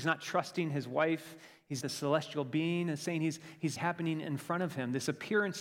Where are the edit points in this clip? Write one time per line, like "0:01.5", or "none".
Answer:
0:01.8
0:03.8